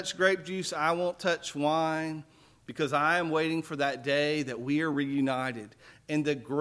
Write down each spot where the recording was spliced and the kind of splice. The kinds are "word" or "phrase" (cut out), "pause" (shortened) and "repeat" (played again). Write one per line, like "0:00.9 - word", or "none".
none